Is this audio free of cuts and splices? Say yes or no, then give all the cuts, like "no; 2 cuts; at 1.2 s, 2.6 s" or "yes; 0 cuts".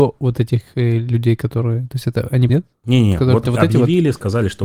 no; 2 cuts; at 2.5 s, 3.4 s